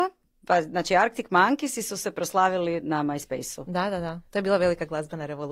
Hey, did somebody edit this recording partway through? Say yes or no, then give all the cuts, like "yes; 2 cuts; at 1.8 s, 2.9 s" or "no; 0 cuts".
no; 0 cuts